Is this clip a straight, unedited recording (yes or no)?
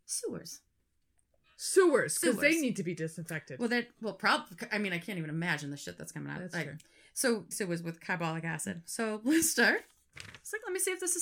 no